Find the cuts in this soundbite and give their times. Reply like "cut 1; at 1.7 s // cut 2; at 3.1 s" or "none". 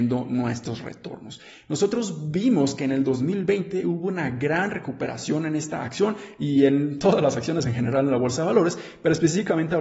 none